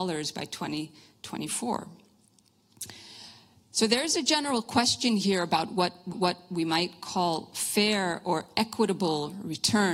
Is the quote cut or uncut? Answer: cut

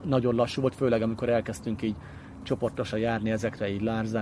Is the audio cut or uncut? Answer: uncut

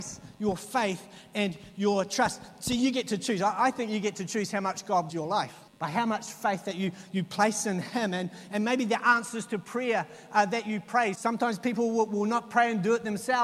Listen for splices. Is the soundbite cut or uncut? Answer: cut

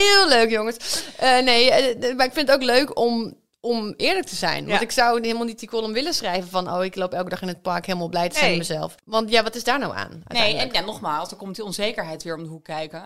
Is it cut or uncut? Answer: uncut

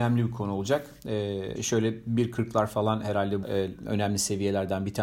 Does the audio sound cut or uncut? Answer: cut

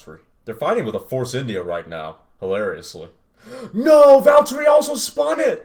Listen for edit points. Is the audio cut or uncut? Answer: uncut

